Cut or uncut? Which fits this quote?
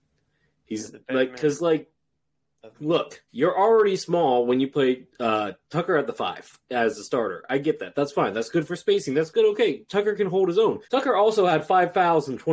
cut